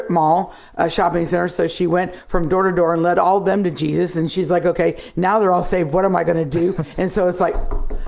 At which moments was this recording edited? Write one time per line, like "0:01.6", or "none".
none